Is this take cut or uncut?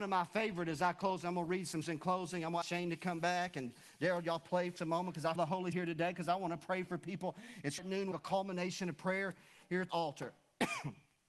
cut